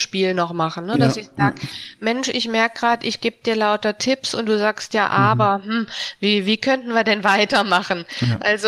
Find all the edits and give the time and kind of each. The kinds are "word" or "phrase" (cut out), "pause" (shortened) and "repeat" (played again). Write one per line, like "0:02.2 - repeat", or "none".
none